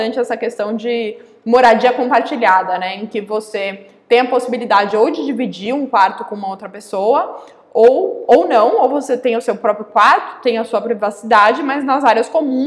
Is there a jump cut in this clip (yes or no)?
no